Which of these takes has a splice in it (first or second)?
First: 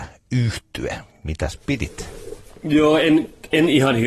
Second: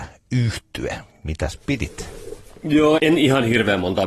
second